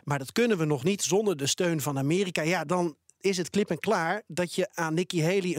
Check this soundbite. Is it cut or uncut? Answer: uncut